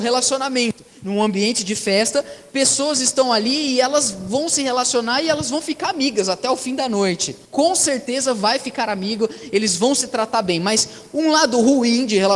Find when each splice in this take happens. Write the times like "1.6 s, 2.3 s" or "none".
7.5 s